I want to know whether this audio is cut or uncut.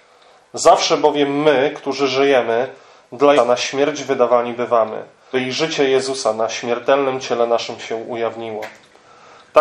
cut